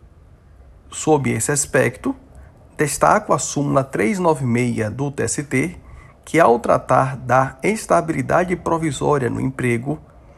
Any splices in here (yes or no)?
no